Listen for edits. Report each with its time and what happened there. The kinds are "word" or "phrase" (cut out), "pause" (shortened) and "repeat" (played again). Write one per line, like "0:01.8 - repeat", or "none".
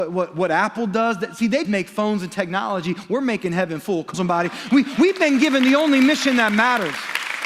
0:01.6 - word
0:04.1 - word